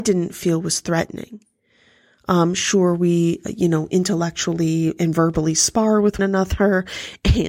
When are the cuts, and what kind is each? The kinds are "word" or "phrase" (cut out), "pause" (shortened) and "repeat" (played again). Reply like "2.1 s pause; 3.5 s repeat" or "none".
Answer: 6.2 s word